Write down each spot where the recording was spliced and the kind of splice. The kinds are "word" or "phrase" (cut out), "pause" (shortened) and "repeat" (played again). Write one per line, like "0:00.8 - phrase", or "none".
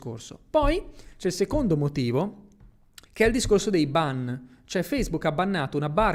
0:03.1 - pause